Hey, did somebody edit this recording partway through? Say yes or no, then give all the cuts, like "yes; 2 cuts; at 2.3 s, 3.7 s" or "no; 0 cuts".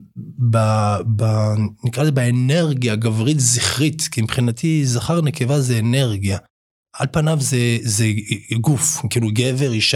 no; 0 cuts